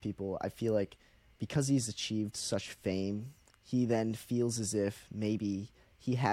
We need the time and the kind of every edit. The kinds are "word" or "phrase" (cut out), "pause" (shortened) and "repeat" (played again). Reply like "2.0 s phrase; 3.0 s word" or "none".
none

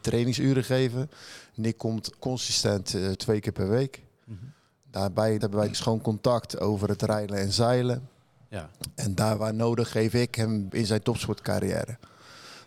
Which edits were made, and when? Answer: 2.2 s word; 3.1 s word; 5.4 s word; 5.7 s word; 10.7 s word

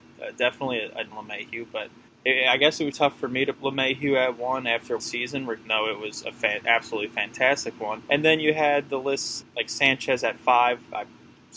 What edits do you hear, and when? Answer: 1.1 s phrase; 2.1 s pause; 2.9 s word; 3.5 s word; 5.0 s word; 5.7 s word; 8.1 s pause; 9.4 s word

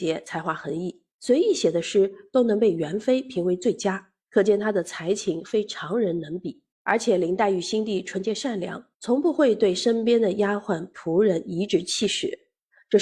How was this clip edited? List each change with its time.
1.1 s pause; 4.2 s pause; 6.7 s pause; 8.9 s pause

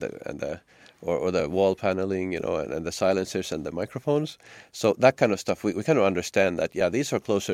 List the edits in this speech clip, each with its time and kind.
none

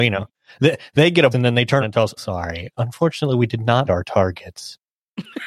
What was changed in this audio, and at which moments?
1.3 s word; 1.8 s word; 2.2 s word; 2.7 s word; 3.9 s word

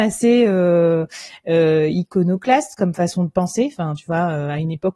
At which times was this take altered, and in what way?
none

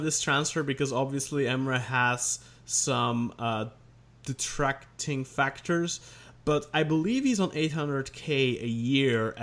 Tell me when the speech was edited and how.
none

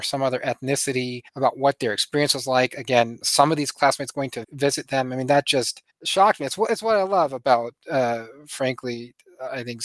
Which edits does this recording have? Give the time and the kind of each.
1.3 s pause; 3.2 s word; 4.4 s word; 5.9 s pause

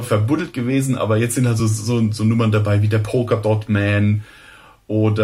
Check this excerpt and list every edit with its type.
none

